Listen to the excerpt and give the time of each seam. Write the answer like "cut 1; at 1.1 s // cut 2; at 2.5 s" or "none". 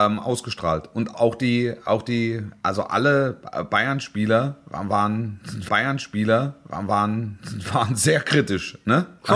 cut 1; at 1.1 s // cut 2; at 5.7 s